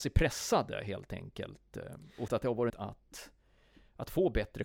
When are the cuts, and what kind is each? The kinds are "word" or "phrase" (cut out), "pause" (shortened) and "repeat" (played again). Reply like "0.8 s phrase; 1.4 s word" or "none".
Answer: 2.3 s word; 2.7 s word